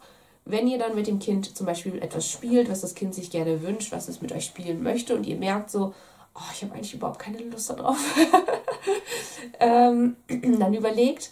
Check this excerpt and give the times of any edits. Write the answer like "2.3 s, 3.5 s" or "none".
none

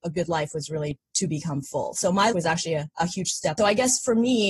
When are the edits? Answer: 2.3 s, 3.6 s

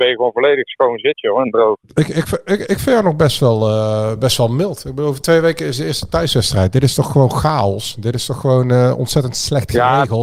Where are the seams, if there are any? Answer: 1.8 s

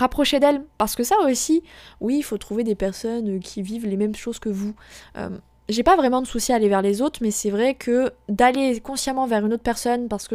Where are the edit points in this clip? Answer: none

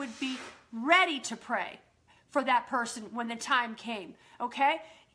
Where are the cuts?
none

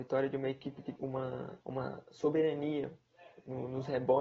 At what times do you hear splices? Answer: 1.0 s, 1.6 s

